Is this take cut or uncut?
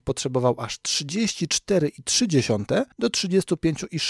cut